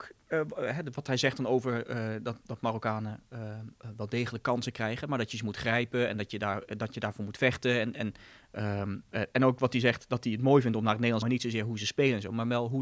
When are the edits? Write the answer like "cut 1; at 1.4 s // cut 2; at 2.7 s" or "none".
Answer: cut 1; at 11.2 s